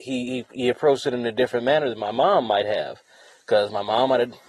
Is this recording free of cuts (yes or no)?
yes